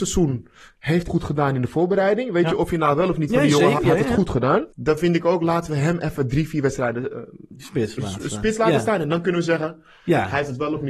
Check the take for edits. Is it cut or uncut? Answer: cut